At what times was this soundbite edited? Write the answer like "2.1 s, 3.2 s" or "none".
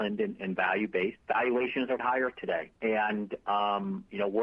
1.2 s, 2.0 s, 2.8 s